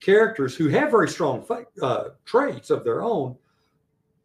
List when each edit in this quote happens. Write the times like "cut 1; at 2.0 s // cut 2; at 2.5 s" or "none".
none